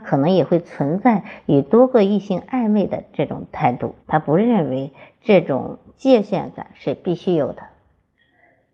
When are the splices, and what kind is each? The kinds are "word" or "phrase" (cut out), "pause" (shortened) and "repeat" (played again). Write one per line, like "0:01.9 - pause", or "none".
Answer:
0:04.0 - pause